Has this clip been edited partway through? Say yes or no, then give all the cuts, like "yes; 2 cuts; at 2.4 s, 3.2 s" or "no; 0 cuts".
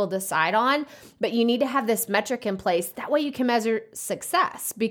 no; 0 cuts